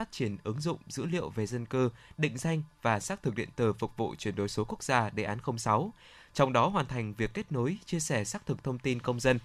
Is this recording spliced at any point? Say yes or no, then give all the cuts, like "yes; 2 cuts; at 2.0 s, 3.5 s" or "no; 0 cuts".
no; 0 cuts